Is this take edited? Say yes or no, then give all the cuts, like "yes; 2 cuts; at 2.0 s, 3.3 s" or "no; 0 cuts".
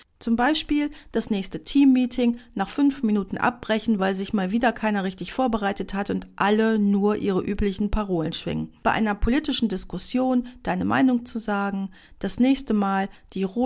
no; 0 cuts